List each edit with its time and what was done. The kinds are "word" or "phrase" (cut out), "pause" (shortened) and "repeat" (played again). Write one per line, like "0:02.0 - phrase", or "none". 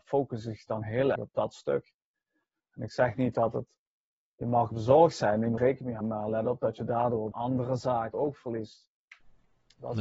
0:01.2 - word
0:04.7 - word
0:05.6 - word
0:06.0 - word
0:07.3 - word
0:08.1 - word